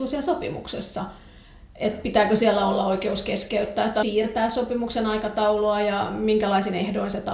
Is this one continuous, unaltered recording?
no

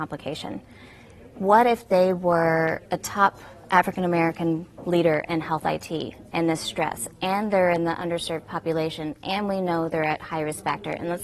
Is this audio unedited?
no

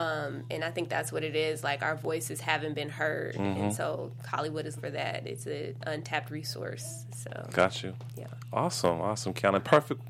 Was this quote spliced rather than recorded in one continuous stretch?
yes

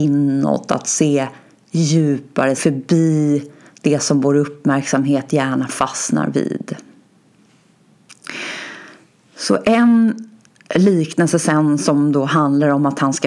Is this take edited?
yes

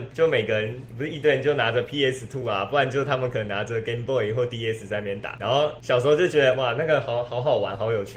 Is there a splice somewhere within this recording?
no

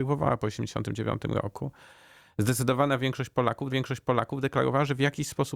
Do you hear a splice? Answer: yes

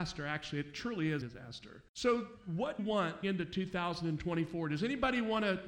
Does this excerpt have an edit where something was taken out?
yes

